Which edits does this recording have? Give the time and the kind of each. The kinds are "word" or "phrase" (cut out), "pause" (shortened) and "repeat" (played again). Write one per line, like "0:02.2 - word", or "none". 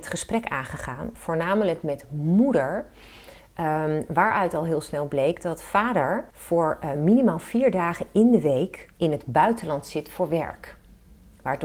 0:06.3 - pause
0:08.9 - pause